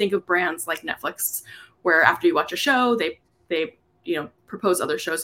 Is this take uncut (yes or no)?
yes